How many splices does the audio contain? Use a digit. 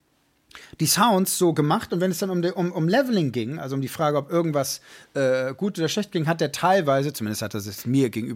0